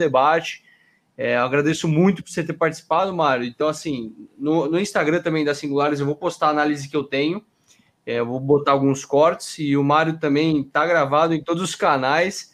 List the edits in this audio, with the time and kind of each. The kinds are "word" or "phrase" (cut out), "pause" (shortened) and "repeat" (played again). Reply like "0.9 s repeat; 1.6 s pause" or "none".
none